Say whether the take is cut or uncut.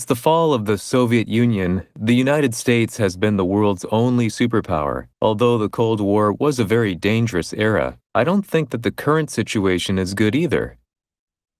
cut